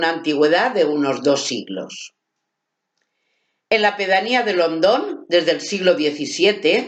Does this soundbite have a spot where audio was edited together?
no; 0 cuts

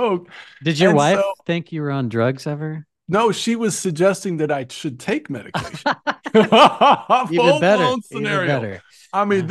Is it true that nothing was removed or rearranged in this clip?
yes; 0 cuts

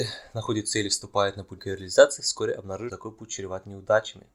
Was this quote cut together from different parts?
yes; 2 cuts; at 1.6 s, 2.9 s

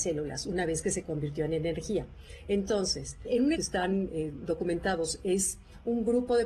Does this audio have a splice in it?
yes; 1 cut; at 3.5 s

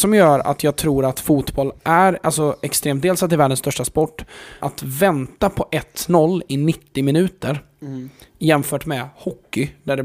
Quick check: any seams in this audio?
yes; 2 cuts; at 1.8 s, 4.6 s

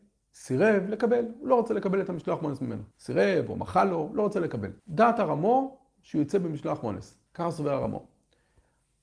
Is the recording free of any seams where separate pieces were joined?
no; 3 cuts; at 2.9 s, 4.8 s, 7.3 s

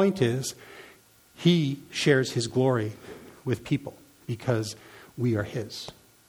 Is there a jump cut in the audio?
no; 0 cuts

